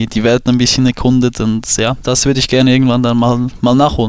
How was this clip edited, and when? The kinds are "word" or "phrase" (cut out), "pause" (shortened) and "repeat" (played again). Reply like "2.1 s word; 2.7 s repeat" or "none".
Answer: 2.0 s word